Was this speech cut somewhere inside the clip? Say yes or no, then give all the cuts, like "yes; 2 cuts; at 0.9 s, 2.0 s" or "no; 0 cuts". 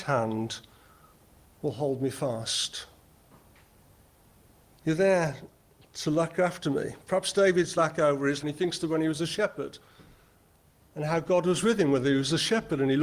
yes; 2 cuts; at 7.8 s, 8.4 s